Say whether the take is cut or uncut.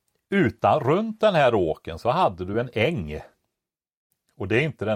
uncut